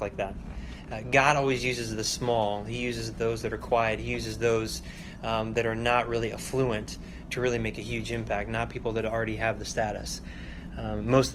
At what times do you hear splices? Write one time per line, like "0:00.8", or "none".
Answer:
none